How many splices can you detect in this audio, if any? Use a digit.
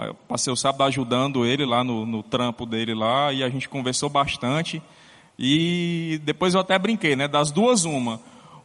0